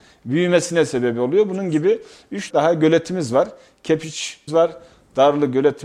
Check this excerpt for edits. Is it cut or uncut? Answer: cut